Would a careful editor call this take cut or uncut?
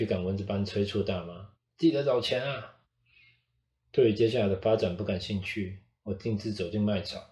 cut